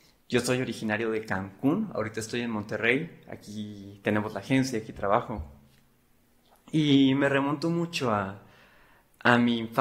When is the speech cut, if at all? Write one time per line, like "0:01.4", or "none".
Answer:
none